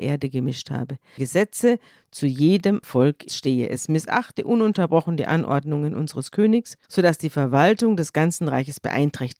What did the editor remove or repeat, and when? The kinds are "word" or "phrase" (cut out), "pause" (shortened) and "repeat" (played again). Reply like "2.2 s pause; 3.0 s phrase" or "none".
1.2 s phrase; 2.8 s word; 3.3 s phrase; 6.8 s pause